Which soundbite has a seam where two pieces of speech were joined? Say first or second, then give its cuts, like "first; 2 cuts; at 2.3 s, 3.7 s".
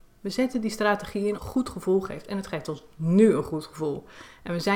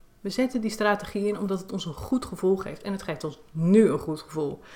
first; 1 cut; at 1.4 s